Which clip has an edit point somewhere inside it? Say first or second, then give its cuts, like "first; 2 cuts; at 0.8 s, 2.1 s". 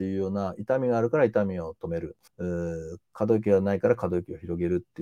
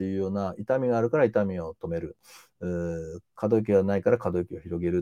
first; 1 cut; at 2.3 s